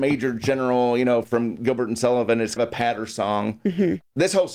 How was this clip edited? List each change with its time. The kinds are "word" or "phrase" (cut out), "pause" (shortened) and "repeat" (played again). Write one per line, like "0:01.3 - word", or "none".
0:01.2 - word
0:02.6 - word